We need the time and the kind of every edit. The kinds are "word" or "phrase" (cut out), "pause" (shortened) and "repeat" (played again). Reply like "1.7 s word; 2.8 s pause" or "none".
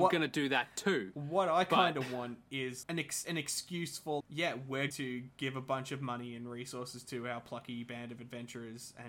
2.8 s word; 3.2 s word; 4.2 s word; 4.9 s word